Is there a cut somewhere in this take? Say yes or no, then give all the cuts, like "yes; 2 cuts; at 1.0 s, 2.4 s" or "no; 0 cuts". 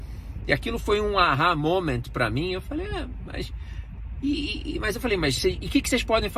no; 0 cuts